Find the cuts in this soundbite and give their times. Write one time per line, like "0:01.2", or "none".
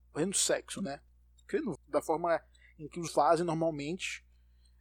0:01.8
0:03.1